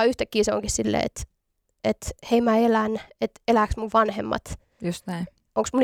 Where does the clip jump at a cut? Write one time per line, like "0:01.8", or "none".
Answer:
none